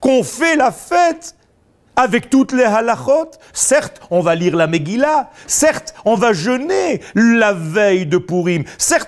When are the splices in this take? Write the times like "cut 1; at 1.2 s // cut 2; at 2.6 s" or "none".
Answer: none